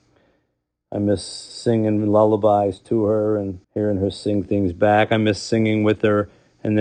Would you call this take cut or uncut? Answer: cut